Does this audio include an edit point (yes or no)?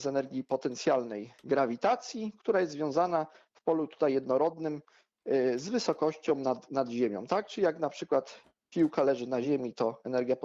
no